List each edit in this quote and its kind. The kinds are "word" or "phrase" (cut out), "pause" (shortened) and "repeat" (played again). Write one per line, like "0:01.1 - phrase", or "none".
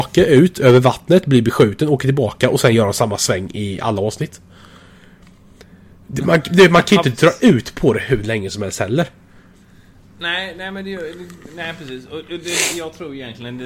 none